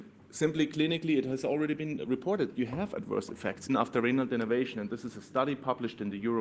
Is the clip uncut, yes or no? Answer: no